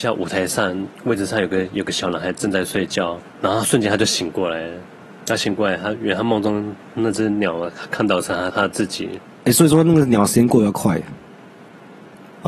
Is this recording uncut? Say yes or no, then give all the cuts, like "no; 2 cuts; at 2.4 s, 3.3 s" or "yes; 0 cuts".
yes; 0 cuts